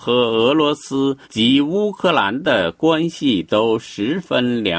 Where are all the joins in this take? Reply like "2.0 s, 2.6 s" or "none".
1.2 s